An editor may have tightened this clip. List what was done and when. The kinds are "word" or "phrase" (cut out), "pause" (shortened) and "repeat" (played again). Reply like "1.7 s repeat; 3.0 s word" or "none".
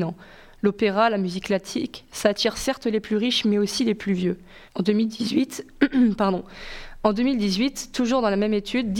4.7 s pause